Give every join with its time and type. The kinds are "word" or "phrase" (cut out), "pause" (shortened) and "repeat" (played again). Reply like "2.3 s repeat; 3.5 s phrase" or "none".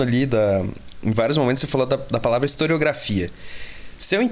none